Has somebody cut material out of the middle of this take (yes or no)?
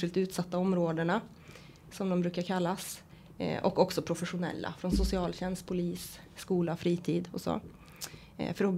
no